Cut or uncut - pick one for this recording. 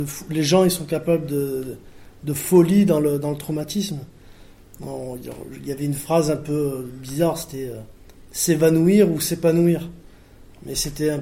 uncut